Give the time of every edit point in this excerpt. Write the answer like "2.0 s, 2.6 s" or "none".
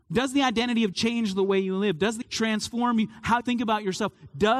0.9 s, 2.2 s, 3.4 s